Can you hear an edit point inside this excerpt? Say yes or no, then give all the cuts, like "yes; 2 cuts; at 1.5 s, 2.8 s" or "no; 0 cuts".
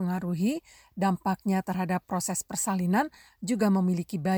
no; 0 cuts